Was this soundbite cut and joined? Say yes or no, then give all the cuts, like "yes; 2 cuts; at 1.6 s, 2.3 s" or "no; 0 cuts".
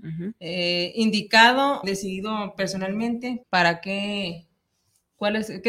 yes; 2 cuts; at 1.8 s, 3.4 s